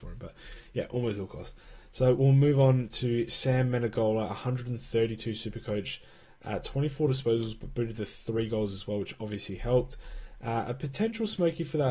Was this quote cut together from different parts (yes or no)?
no